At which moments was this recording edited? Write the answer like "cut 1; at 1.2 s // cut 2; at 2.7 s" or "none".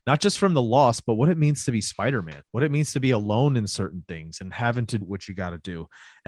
cut 1; at 2.5 s // cut 2; at 5.0 s